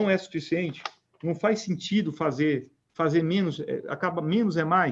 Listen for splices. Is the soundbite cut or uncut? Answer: uncut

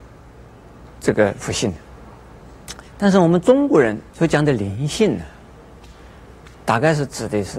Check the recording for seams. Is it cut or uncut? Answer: cut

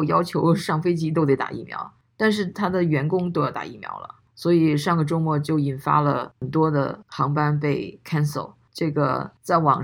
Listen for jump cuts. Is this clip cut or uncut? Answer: uncut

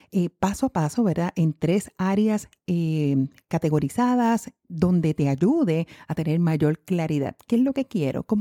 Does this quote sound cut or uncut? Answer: uncut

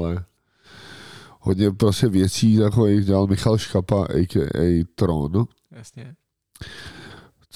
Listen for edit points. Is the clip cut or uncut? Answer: uncut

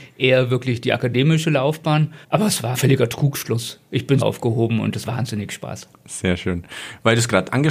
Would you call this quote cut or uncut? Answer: cut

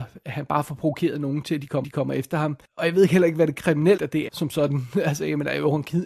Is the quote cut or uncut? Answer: cut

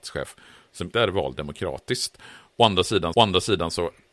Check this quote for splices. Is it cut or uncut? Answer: cut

